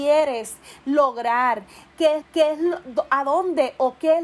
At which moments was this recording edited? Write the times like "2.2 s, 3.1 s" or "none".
2.2 s